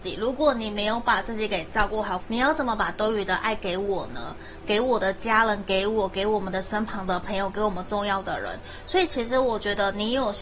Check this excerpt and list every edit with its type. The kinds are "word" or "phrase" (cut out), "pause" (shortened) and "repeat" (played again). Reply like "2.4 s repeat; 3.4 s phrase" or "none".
2.2 s phrase